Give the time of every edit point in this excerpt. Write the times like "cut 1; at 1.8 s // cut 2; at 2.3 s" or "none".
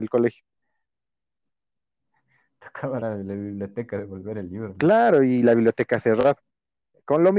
cut 1; at 3.0 s